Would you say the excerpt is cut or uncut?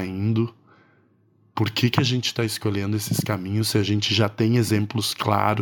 uncut